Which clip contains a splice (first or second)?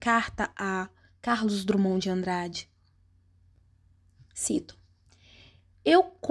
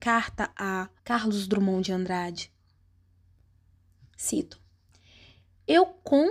second